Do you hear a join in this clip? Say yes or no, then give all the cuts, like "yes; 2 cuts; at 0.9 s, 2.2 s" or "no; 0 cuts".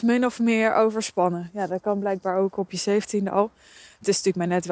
no; 0 cuts